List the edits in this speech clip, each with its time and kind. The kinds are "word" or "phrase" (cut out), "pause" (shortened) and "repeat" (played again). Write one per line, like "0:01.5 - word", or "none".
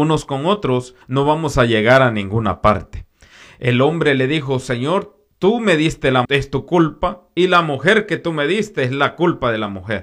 0:01.0 - pause
0:06.2 - phrase